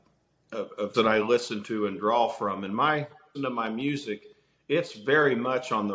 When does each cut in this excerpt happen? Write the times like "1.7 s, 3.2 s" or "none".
0.9 s, 3.3 s